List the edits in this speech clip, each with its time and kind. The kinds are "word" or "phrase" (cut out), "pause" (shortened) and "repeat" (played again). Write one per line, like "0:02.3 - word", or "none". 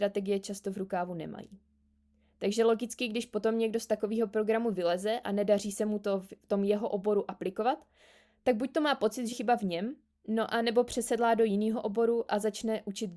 0:09.3 - word

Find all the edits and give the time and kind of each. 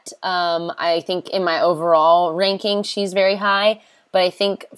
none

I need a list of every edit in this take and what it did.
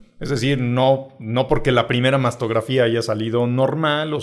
none

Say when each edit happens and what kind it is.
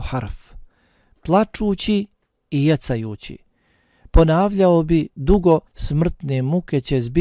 0:05.7 - pause

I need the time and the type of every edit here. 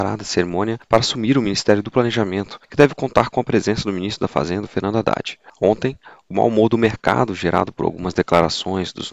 none

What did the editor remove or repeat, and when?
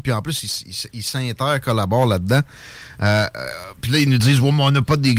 none

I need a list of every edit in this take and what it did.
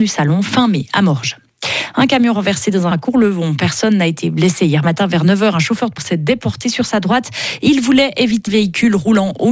0:02.9 - word
0:06.0 - word
0:08.5 - word

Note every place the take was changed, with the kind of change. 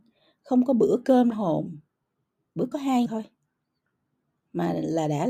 0:01.3 - word
0:02.7 - word
0:03.1 - word

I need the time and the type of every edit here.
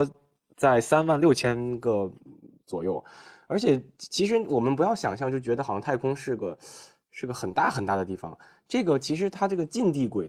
none

